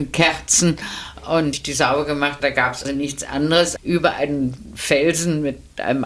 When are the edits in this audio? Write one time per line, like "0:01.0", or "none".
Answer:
0:01.5
0:02.4
0:02.8
0:03.8

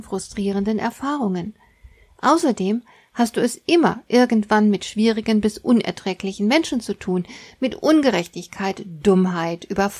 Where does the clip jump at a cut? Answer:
none

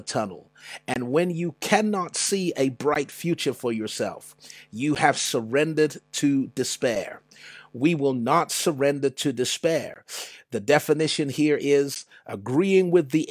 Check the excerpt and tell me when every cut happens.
none

